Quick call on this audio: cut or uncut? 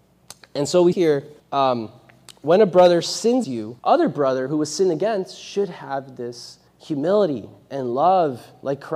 cut